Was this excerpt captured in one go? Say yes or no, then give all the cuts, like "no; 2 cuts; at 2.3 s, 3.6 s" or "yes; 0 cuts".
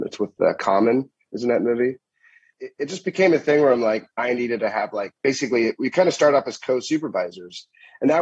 yes; 0 cuts